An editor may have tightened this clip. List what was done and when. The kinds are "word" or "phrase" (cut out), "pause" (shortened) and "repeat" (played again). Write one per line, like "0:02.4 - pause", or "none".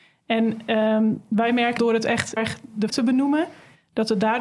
0:01.8 - word
0:02.4 - word
0:02.9 - word